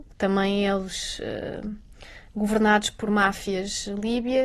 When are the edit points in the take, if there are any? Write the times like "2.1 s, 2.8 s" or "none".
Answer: none